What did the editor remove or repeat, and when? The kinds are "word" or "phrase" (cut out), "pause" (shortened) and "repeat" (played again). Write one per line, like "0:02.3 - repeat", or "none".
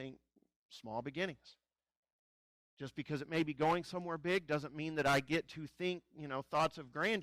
none